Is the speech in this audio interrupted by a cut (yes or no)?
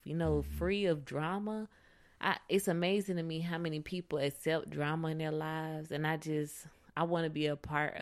no